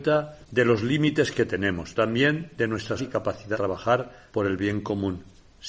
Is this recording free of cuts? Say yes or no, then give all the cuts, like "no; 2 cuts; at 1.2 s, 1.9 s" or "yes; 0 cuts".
no; 3 cuts; at 2.0 s, 3.0 s, 3.5 s